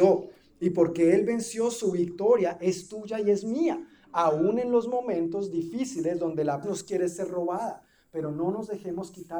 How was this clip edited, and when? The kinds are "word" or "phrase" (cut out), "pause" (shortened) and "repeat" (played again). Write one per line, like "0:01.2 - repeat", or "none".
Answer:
0:06.6 - word